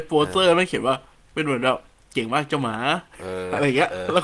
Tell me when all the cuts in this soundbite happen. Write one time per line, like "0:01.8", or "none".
0:01.3